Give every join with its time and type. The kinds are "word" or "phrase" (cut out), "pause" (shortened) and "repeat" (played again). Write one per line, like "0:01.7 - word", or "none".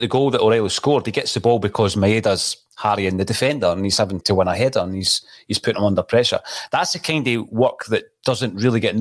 0:04.2 - word